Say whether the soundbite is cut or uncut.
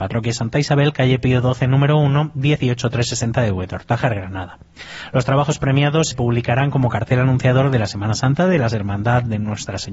cut